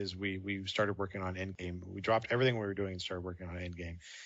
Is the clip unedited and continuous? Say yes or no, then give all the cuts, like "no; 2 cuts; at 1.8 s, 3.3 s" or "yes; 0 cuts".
yes; 0 cuts